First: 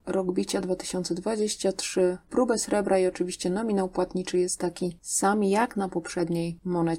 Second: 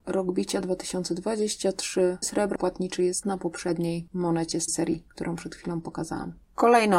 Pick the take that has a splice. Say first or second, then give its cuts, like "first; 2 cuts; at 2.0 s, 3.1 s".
second; 4 cuts; at 2.2 s, 2.6 s, 3.2 s, 4.7 s